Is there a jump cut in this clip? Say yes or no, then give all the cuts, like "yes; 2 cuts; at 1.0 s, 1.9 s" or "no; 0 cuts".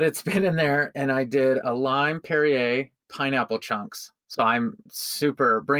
yes; 2 cuts; at 3.0 s, 4.2 s